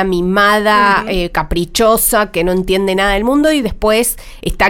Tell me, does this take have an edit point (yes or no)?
no